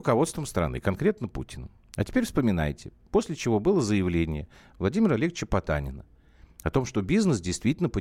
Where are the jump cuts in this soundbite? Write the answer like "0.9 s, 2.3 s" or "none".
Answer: none